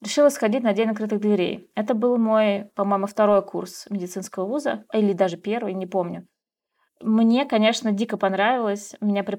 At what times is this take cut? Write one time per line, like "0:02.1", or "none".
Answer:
none